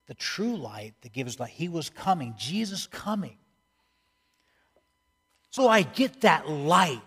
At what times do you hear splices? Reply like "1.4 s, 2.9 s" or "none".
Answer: 2.9 s, 5.6 s